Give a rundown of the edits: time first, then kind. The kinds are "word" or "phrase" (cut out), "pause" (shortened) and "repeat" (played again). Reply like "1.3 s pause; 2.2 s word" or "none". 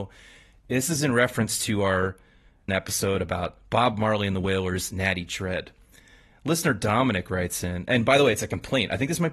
2.7 s word